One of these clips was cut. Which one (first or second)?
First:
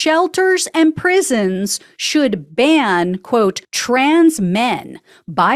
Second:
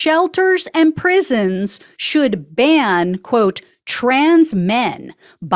first